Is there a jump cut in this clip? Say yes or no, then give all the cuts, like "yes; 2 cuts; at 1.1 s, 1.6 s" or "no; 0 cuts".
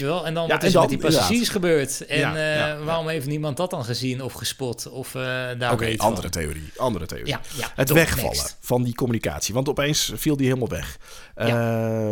no; 0 cuts